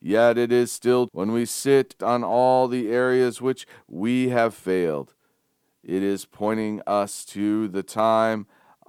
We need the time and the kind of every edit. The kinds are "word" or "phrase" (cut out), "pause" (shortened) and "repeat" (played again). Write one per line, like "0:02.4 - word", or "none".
0:01.1 - word
0:02.0 - phrase